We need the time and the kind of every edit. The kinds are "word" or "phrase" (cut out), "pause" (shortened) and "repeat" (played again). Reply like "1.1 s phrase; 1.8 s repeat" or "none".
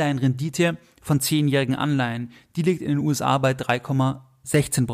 none